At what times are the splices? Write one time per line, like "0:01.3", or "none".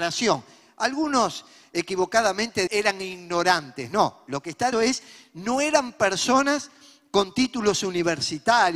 0:02.7
0:04.7